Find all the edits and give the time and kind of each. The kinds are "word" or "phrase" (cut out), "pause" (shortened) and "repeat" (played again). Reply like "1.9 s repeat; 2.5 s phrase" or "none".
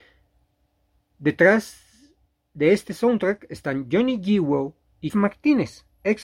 5.1 s word